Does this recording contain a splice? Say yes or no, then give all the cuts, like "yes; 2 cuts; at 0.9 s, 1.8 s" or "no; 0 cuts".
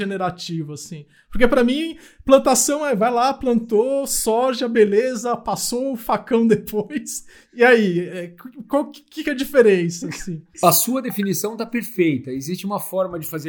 no; 0 cuts